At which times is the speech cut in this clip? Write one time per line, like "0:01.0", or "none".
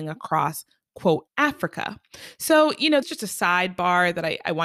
0:01.3
0:03.0

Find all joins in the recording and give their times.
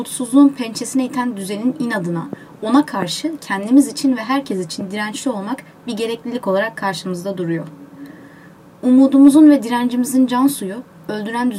none

